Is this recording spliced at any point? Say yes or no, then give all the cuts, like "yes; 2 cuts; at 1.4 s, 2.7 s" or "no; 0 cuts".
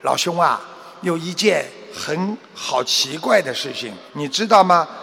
yes; 1 cut; at 4.1 s